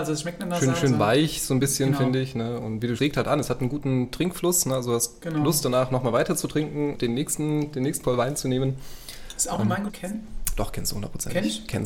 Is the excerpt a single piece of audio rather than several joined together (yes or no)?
no